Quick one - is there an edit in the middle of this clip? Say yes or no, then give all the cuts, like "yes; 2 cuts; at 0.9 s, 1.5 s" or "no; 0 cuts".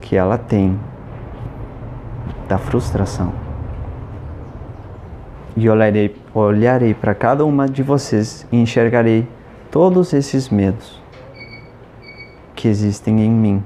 no; 0 cuts